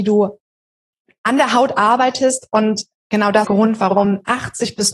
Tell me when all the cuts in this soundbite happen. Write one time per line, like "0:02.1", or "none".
0:03.4